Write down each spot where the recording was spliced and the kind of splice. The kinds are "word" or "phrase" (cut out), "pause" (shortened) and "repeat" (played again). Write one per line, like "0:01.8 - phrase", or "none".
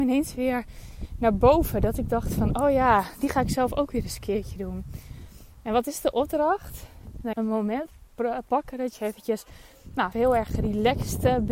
0:07.3 - phrase
0:10.1 - word